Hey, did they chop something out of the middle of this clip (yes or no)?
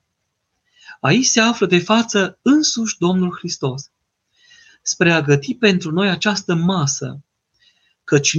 no